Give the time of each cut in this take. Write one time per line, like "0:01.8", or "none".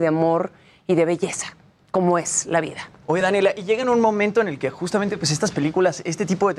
none